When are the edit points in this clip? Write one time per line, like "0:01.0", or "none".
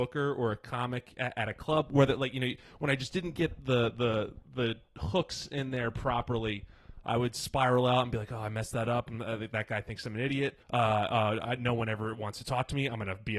0:10.6